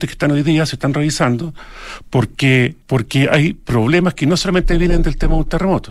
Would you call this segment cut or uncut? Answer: cut